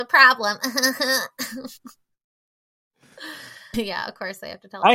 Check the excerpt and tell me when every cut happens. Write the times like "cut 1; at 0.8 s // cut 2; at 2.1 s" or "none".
cut 1; at 1.8 s // cut 2; at 3.7 s